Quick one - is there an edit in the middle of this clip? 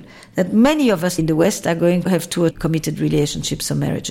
yes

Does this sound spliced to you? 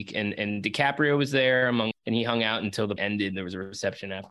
yes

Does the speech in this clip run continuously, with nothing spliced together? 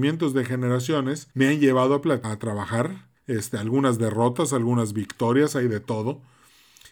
no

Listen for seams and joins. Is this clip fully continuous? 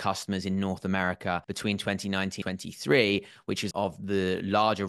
no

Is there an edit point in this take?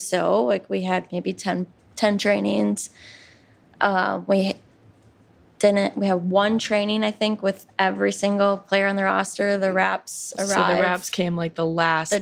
no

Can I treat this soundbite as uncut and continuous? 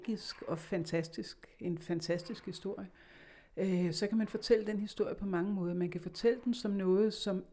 yes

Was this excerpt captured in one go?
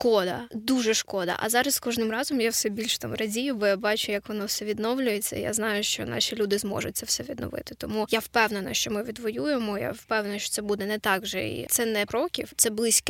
no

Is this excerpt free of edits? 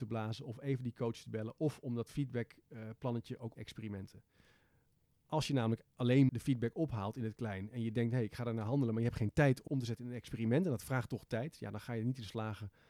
no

